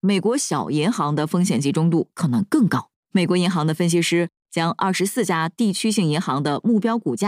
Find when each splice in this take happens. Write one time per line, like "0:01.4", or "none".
0:03.0